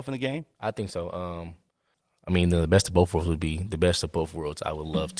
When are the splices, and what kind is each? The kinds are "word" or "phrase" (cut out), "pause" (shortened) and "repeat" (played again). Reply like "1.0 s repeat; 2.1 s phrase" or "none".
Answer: none